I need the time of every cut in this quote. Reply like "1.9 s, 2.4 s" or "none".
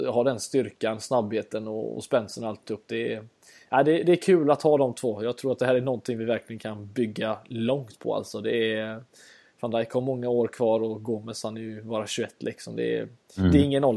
none